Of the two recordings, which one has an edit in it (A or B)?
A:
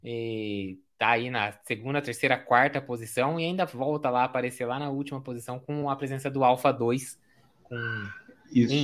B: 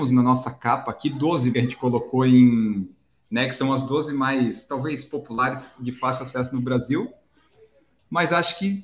B